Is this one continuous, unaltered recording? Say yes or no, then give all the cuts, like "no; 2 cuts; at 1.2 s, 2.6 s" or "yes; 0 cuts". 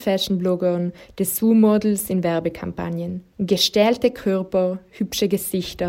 no; 1 cut; at 3.3 s